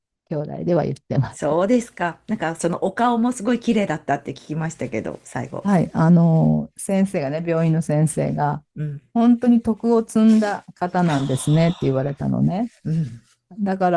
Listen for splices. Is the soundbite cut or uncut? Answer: cut